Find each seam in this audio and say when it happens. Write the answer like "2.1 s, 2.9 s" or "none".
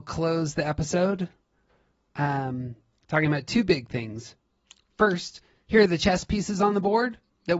none